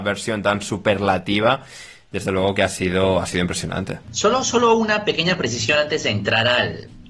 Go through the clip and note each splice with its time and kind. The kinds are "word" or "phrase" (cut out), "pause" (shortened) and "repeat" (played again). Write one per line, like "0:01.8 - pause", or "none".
0:04.0 - pause